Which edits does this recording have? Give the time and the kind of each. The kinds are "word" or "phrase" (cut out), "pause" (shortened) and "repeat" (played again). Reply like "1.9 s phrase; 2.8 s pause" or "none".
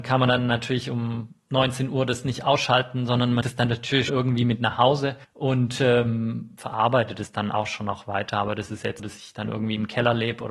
3.4 s word; 4.1 s word; 5.2 s pause; 9.0 s word